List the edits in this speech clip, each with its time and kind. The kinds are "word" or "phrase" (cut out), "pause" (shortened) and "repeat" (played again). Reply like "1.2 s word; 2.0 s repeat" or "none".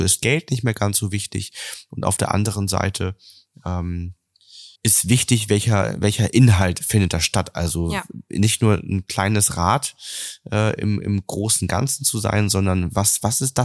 4.8 s pause